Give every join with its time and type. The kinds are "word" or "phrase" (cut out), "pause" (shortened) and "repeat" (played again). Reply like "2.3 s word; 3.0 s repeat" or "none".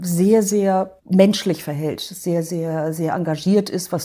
1.0 s pause

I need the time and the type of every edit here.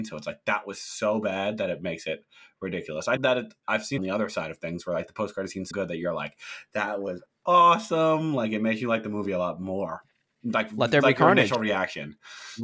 3.2 s word; 4.0 s phrase; 5.7 s word

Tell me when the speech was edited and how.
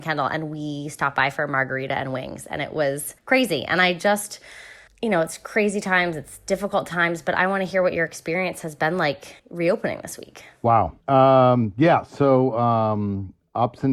3.2 s pause; 4.9 s pause; 9.4 s pause; 11.0 s pause

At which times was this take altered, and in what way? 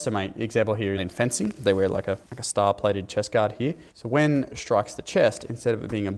1.0 s phrase; 2.2 s pause; 3.9 s pause; 4.5 s phrase

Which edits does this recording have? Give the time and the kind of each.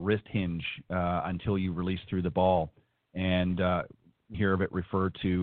4.3 s word

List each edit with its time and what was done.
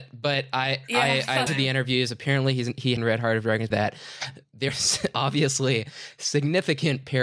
1.5 s word; 3.0 s word; 3.7 s word; 4.7 s word

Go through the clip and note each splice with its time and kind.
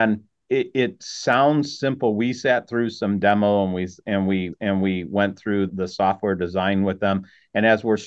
4.5 s repeat; 5.7 s word

